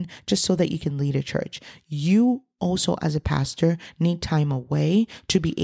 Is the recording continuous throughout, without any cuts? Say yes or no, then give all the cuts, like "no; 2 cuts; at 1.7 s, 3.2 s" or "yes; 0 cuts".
yes; 0 cuts